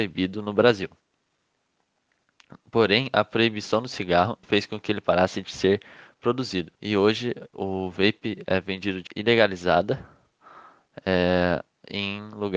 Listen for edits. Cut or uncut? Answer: cut